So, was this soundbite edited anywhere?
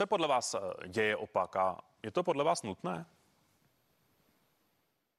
no; 0 cuts

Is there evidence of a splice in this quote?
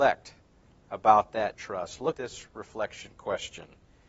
yes; 3 cuts; at 1.5 s, 2.1 s, 2.5 s

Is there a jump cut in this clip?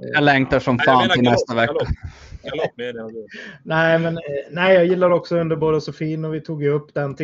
no; 0 cuts

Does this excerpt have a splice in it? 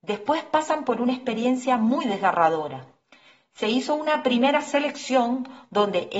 no; 0 cuts

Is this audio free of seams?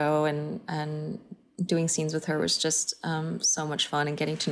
yes; 0 cuts

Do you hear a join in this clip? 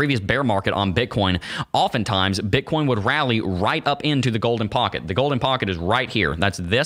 no; 0 cuts

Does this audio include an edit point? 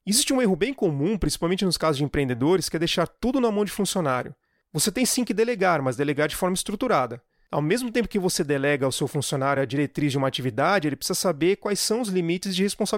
no; 0 cuts

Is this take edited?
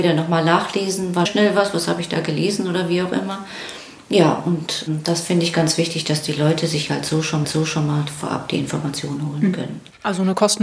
yes; 2 cuts; at 1.3 s, 7.4 s

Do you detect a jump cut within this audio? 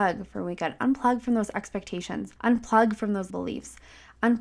yes; 2 cuts; at 2.4 s, 3.3 s

